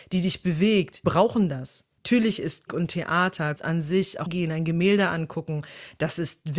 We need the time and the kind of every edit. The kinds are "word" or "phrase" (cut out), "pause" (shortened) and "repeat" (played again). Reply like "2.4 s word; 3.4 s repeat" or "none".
1.0 s word; 2.0 s pause; 2.7 s phrase; 3.6 s word; 4.3 s phrase